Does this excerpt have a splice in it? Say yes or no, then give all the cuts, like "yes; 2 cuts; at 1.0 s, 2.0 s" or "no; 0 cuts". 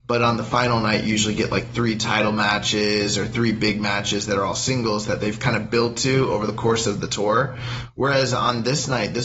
no; 0 cuts